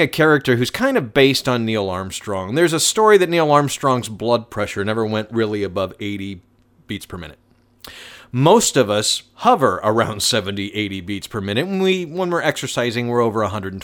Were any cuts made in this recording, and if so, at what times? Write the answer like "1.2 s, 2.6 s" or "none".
none